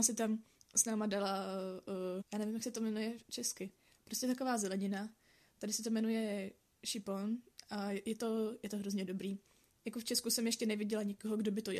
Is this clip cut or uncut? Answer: cut